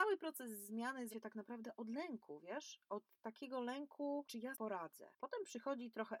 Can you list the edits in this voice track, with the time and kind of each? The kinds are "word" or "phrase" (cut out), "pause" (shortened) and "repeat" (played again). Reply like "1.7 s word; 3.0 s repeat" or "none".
1.1 s word; 4.5 s word